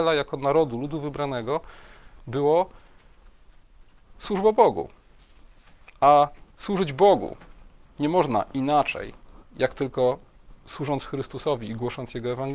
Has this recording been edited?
yes; 1 cut; at 6.5 s

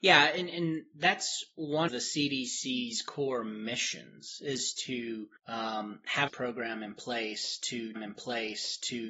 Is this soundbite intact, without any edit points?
no; 4 cuts; at 1.9 s, 5.4 s, 6.3 s, 8.0 s

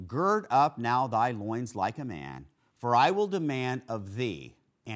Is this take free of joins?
yes; 0 cuts

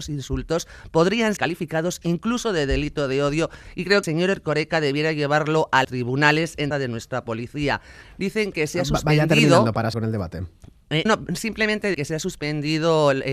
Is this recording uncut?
no; 7 cuts; at 1.4 s, 4.0 s, 5.8 s, 6.7 s, 9.9 s, 11.1 s, 11.9 s

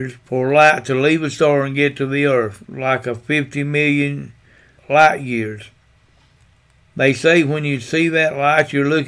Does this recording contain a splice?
yes; 1 cut; at 4.8 s

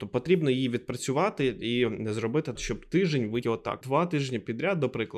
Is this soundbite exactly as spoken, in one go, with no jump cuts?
no; 3 cuts; at 2.6 s, 3.4 s, 3.8 s

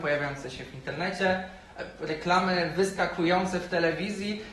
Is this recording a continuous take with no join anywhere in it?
yes; 0 cuts

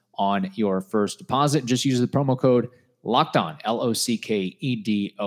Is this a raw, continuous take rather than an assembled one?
yes; 0 cuts

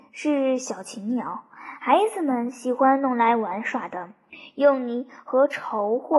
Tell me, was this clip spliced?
no; 0 cuts

